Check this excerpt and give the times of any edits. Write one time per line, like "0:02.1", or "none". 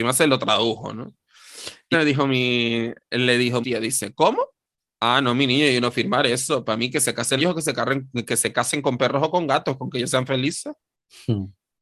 0:01.9
0:03.6
0:07.4